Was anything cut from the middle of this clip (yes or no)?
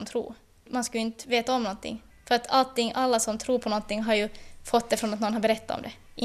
no